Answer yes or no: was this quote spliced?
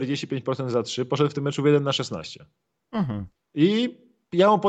no